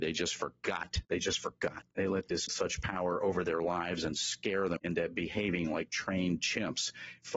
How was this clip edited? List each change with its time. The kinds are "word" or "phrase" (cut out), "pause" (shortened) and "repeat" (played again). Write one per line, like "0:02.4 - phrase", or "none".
0:01.0 - pause
0:01.9 - pause
0:02.5 - phrase
0:04.8 - word